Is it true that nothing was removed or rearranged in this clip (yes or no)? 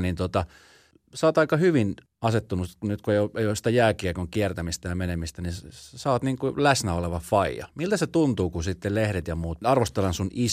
no